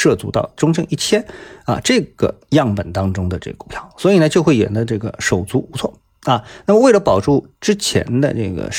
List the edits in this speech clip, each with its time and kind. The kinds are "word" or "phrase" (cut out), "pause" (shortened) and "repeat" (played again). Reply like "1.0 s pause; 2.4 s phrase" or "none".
none